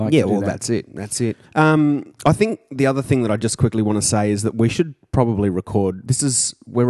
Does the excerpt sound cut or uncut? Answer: cut